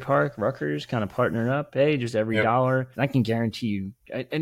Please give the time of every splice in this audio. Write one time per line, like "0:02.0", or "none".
0:02.9